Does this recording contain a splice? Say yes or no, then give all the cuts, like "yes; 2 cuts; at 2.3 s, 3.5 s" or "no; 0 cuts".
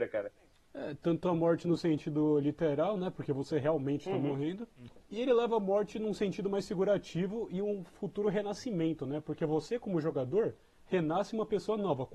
no; 0 cuts